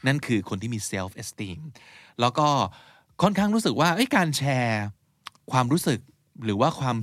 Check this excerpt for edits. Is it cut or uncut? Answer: uncut